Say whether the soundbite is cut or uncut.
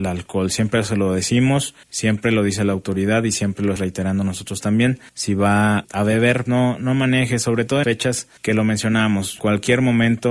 cut